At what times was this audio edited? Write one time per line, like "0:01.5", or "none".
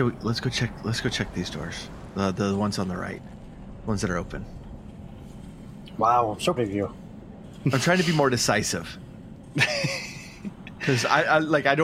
0:06.6